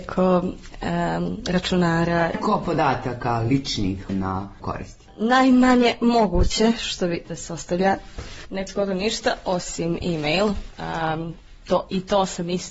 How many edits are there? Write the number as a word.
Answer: four